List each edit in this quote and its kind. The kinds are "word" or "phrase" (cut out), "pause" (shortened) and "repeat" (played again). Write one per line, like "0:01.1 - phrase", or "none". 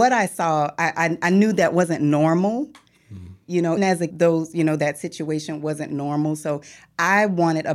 0:03.8 - word
0:04.1 - phrase